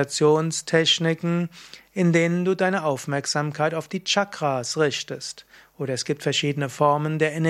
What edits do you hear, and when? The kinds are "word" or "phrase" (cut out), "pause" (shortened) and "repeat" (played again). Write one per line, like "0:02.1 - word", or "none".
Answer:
none